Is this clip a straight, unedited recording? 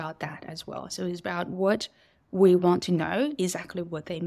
yes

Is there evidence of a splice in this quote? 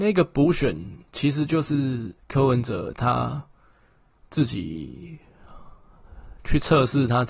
no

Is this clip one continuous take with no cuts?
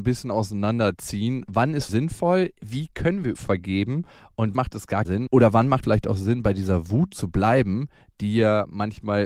no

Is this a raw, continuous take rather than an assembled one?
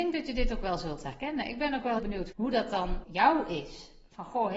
no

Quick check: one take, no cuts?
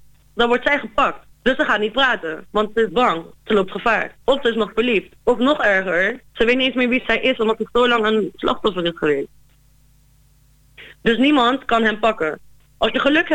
no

